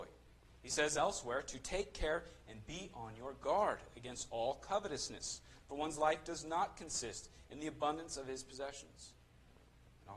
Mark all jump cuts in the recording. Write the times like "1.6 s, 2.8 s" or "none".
none